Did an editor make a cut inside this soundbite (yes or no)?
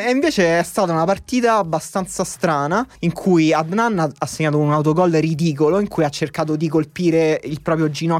yes